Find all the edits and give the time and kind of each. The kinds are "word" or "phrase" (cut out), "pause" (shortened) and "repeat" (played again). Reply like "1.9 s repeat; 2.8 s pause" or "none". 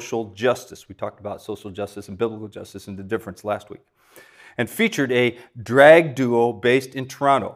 none

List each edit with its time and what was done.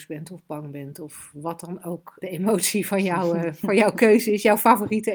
2.2 s word

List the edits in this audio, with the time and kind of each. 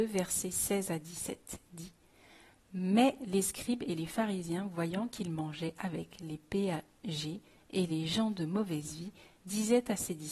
none

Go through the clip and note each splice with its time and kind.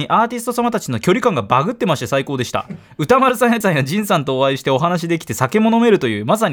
3.6 s word

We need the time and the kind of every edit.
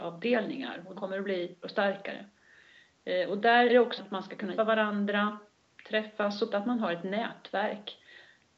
1.0 s word; 1.6 s word; 3.7 s word; 4.0 s word; 4.6 s word; 6.5 s word

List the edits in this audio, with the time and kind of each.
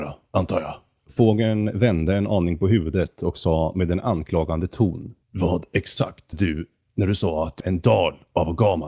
5.2 s pause; 6.3 s word; 7.6 s word

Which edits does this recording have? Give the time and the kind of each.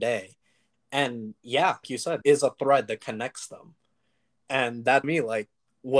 1.8 s word; 2.2 s word; 5.0 s word

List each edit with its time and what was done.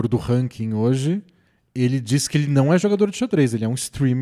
none

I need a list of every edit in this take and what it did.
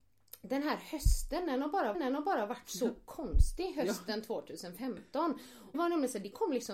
1.9 s repeat; 5.7 s word

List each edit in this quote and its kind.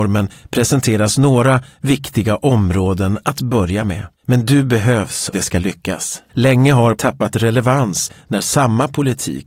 4.1 s pause; 5.3 s word; 6.3 s pause; 7.0 s word

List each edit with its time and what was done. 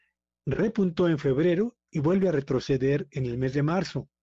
none

